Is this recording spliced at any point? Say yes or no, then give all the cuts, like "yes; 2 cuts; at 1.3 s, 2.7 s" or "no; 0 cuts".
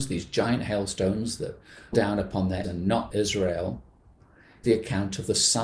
yes; 4 cuts; at 1.9 s, 2.6 s, 3.1 s, 4.6 s